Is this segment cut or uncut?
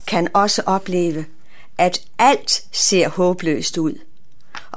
uncut